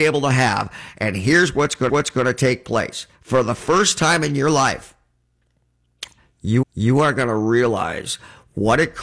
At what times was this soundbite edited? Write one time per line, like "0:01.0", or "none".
0:01.9
0:03.1
0:06.6